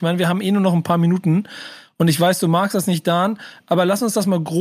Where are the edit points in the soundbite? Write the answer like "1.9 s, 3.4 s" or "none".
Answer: none